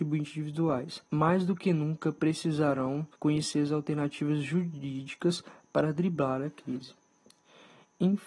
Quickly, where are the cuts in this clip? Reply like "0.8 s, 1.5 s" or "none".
1.0 s, 3.1 s